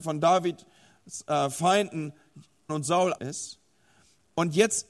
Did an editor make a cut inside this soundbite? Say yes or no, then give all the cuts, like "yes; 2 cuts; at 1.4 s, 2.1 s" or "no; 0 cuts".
yes; 2 cuts; at 2.7 s, 3.2 s